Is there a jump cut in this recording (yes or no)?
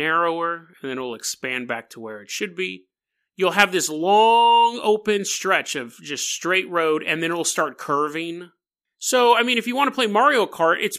no